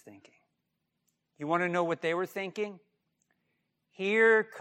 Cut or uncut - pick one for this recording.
uncut